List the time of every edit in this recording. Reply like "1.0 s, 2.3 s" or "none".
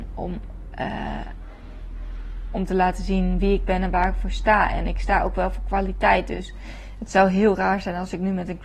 none